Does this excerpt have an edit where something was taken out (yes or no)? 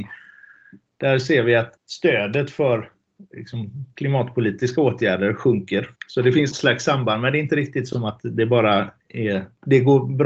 yes